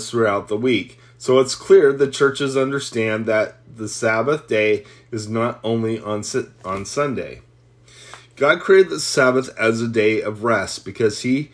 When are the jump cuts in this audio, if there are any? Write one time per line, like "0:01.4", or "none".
none